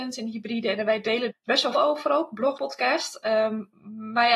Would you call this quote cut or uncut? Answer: cut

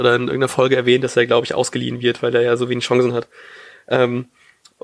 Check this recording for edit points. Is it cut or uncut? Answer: uncut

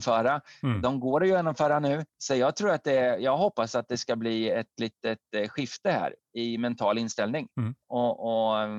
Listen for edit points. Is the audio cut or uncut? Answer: cut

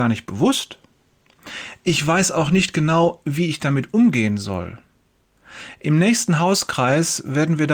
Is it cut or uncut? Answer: uncut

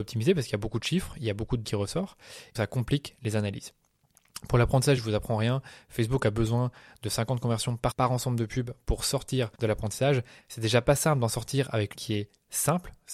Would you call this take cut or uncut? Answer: cut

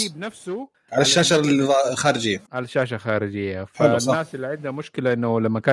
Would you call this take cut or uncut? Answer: cut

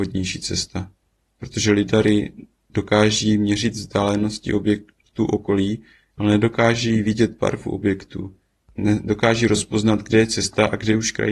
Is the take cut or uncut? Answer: uncut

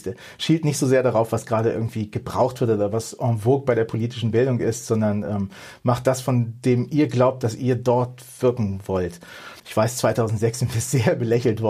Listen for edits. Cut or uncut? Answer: cut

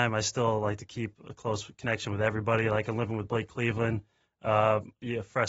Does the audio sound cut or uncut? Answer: uncut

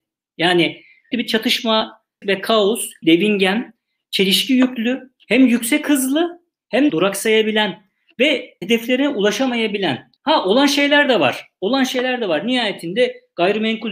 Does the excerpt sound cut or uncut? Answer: cut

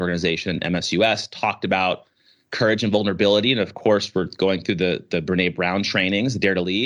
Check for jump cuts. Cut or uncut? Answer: uncut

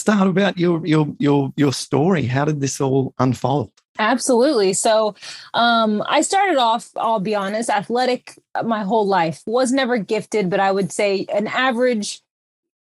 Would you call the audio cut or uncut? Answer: uncut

